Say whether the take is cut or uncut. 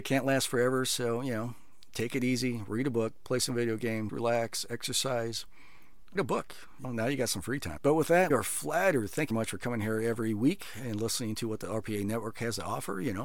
cut